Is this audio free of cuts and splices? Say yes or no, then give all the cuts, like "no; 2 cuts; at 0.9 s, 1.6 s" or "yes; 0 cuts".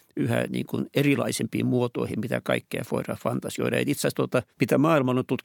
no; 1 cut; at 4.5 s